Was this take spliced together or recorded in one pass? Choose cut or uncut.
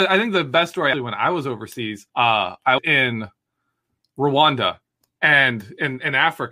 cut